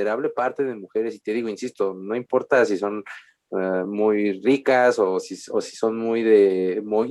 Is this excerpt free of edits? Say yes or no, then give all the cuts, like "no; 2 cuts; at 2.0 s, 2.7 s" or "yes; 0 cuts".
yes; 0 cuts